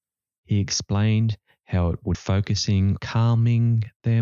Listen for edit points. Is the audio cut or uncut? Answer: cut